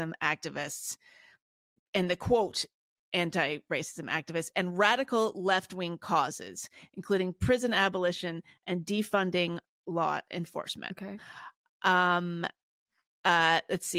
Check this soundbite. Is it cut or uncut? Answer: uncut